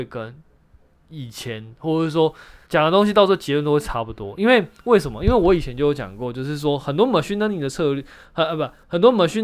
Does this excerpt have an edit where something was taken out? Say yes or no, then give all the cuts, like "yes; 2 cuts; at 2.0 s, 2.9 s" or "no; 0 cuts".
yes; 1 cut; at 2.6 s